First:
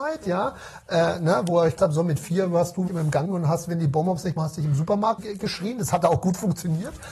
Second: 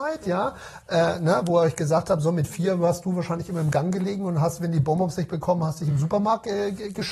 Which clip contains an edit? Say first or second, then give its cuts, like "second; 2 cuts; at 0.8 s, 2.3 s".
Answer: first; 5 cuts; at 1.8 s, 2.9 s, 3.3 s, 4.4 s, 5.2 s